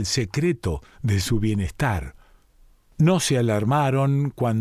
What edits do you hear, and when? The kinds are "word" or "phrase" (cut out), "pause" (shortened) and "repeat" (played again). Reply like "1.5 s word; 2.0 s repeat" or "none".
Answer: 2.7 s pause